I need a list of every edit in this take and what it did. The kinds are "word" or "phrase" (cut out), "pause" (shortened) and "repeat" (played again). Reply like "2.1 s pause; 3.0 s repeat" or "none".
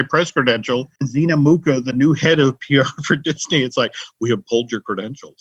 1.0 s pause